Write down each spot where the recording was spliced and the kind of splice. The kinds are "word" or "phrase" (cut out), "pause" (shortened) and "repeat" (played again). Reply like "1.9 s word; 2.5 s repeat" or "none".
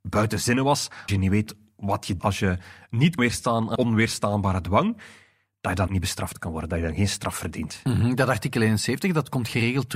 1.1 s word; 2.2 s word; 3.2 s word; 3.8 s word; 5.9 s word